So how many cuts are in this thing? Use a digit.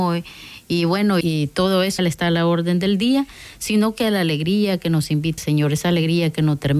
3